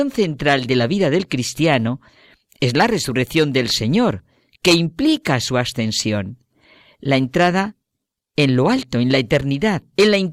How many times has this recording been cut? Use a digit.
0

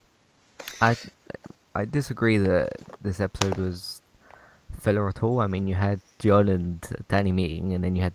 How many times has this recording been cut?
0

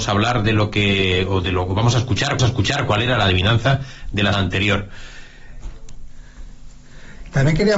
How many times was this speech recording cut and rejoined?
3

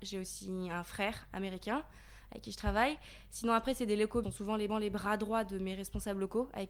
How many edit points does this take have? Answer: 2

